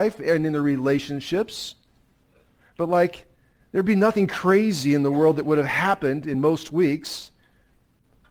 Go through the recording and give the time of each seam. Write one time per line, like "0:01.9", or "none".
none